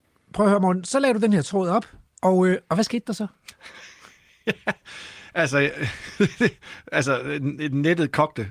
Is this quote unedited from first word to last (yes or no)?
yes